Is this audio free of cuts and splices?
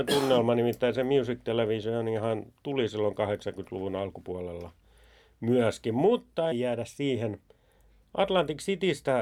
no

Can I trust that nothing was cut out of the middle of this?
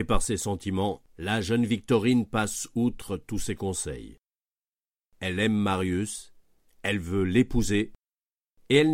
no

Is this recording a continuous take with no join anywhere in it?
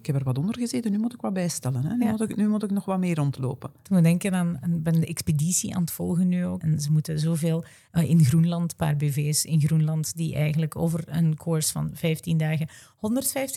no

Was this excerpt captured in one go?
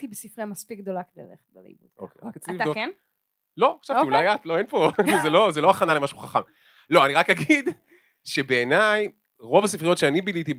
yes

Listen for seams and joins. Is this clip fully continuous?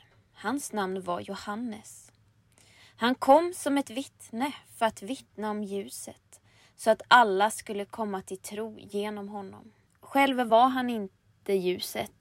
yes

